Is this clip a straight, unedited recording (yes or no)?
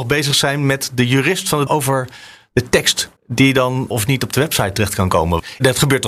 no